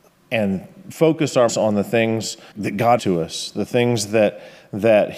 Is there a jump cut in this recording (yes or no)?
yes